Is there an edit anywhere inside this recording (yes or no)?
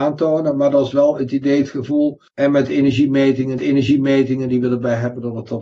yes